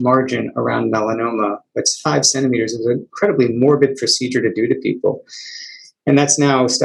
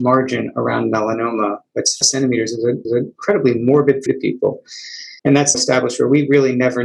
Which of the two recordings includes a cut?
second; 5 cuts; at 2.0 s, 2.8 s, 4.1 s, 5.2 s, 5.5 s

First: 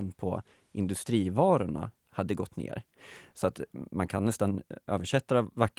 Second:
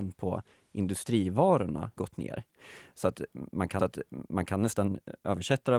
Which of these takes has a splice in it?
second; 2 cuts; at 2.0 s, 3.8 s

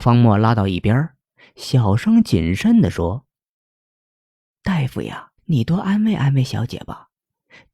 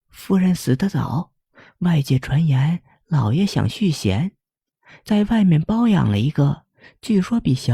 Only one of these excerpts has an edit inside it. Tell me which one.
first; 1 cut; at 5.4 s

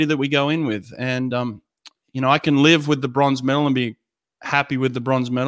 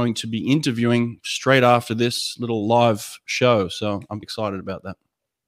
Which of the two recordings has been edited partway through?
second; 1 cut; at 4.2 s

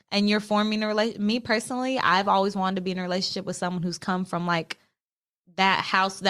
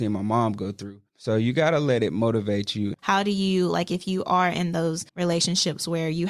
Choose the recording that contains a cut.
second; 1 cut; at 5.1 s

